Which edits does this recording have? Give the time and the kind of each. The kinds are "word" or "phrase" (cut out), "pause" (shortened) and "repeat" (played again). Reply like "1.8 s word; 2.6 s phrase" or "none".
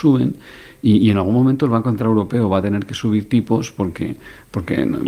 none